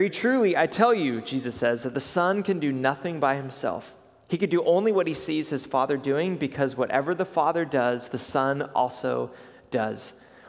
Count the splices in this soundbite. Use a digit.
0